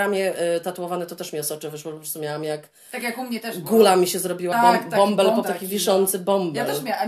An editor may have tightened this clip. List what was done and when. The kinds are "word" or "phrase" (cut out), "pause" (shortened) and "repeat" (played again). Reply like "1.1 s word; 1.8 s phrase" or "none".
4.5 s word; 5.4 s word